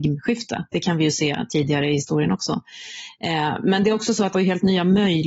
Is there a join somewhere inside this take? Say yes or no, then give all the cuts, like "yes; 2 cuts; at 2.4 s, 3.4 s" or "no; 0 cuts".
yes; 1 cut; at 4.3 s